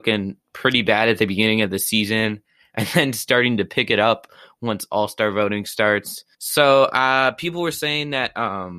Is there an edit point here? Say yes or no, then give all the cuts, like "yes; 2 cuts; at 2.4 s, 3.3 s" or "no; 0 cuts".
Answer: yes; 1 cut; at 6.3 s